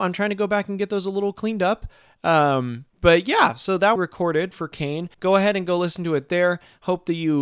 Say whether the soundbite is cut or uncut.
cut